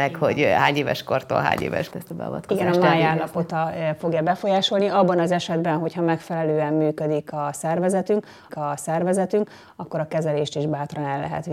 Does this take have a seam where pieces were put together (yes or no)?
yes